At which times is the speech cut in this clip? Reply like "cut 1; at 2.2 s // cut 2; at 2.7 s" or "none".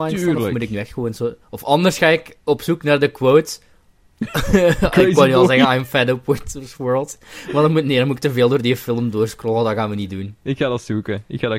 none

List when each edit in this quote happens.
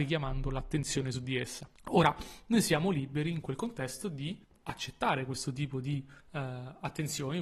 cut 1; at 1.7 s // cut 2; at 4.4 s // cut 3; at 6.2 s

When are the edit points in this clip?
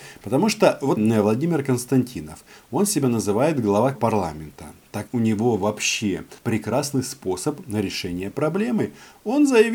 cut 1; at 1.0 s // cut 2; at 3.9 s // cut 3; at 5.1 s // cut 4; at 6.4 s

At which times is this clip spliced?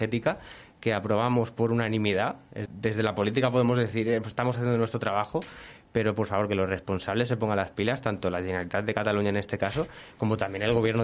cut 1; at 2.7 s

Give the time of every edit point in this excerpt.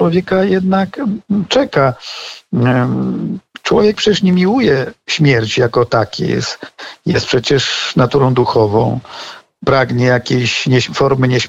none

